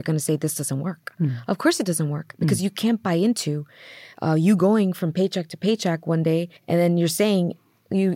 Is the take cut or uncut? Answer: cut